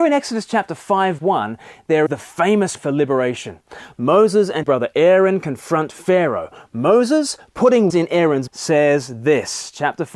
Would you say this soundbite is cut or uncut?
cut